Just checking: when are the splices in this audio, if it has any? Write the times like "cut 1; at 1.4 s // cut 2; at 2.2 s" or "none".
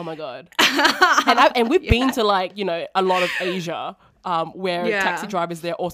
none

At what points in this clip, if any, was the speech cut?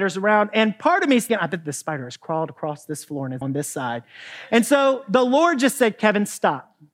cut 1; at 1.3 s // cut 2; at 3.4 s

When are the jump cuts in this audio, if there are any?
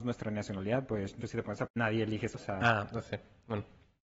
cut 1; at 1.2 s // cut 2; at 1.7 s // cut 3; at 2.3 s

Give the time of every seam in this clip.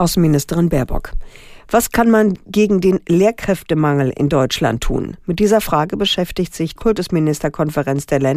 cut 1; at 6.8 s

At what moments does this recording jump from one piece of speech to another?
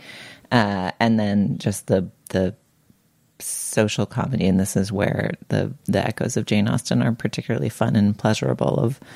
none

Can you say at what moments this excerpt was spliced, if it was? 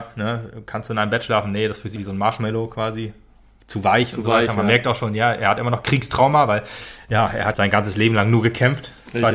cut 1; at 2.0 s // cut 2; at 7.5 s

